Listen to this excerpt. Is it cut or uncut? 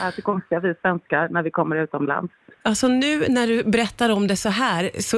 uncut